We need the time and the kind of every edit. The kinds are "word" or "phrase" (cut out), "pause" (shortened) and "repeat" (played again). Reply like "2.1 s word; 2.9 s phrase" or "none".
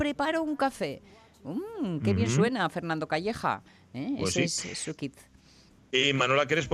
none